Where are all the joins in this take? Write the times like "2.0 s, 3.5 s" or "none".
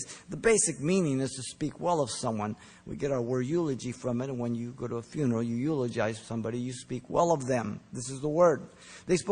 none